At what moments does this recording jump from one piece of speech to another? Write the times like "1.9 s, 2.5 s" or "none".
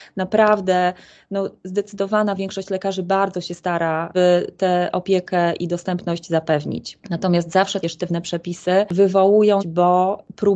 4.1 s, 7.8 s, 9.6 s